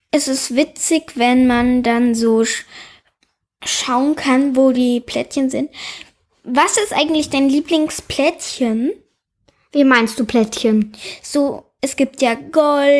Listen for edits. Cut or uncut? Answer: uncut